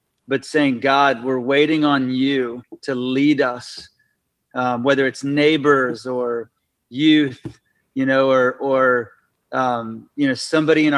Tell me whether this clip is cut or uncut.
uncut